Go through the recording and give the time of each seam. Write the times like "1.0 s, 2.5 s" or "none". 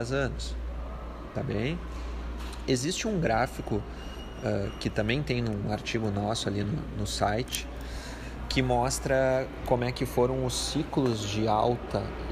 none